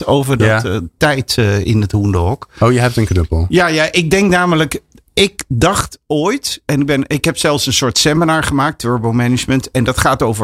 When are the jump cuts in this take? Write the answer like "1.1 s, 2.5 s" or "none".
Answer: none